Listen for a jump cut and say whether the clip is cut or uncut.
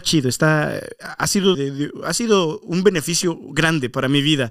cut